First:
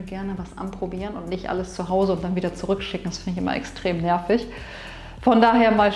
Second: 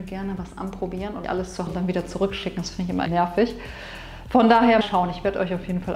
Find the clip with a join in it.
second; 4 cuts; at 1.2 s, 1.7 s, 3.1 s, 4.8 s

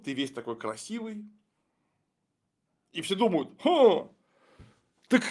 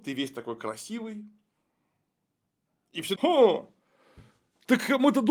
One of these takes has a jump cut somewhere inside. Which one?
second; 1 cut; at 3.2 s

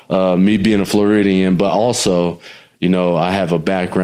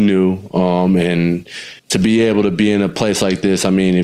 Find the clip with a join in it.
second; 1 cut; at 1.8 s

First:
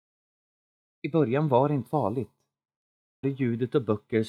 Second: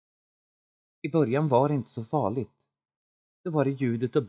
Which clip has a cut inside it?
first; 2 cuts; at 1.9 s, 3.2 s

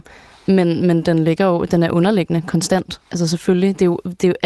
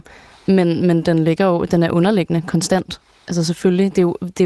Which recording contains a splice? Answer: first; 1 cut; at 3.1 s

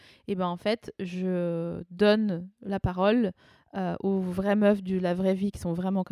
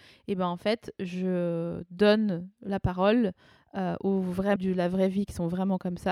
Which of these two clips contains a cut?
second; 1 cut; at 4.6 s

